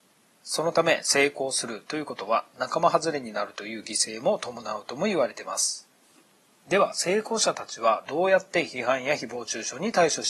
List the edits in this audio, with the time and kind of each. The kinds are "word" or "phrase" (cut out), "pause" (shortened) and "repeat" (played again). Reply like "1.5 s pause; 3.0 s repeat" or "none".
none